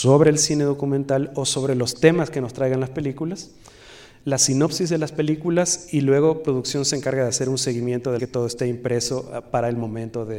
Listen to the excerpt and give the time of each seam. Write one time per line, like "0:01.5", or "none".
0:08.2